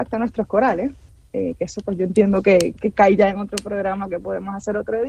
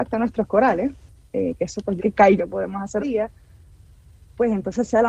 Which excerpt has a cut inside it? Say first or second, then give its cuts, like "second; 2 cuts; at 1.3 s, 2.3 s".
second; 3 cuts; at 2.0 s, 2.4 s, 3.0 s